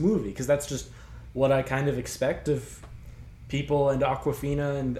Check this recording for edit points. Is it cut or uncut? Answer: uncut